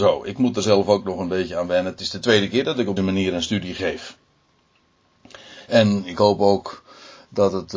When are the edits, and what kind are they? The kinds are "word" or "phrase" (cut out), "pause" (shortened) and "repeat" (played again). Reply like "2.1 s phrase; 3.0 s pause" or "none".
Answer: 3.0 s word